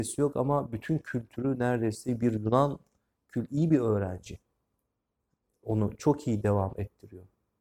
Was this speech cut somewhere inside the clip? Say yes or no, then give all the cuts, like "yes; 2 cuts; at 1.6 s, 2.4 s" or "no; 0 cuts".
no; 0 cuts